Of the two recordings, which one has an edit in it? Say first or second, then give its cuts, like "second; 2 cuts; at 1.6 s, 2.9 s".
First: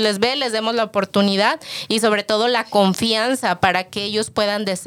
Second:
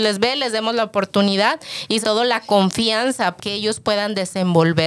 second; 2 cuts; at 2.0 s, 3.4 s